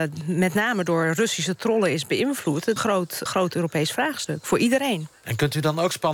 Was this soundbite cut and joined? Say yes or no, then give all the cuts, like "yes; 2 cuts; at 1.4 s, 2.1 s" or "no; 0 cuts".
yes; 2 cuts; at 2.8 s, 3.3 s